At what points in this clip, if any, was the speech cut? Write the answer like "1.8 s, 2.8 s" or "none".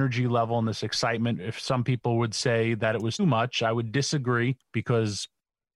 3.2 s, 4.6 s